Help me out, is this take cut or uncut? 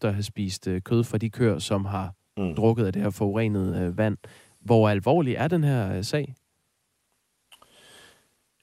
uncut